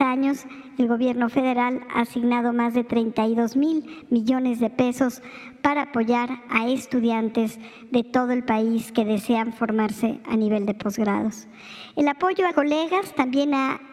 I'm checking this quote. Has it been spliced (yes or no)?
yes